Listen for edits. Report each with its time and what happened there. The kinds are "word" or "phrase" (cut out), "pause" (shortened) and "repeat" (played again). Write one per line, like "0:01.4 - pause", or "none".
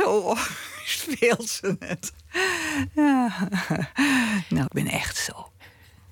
0:04.7 - word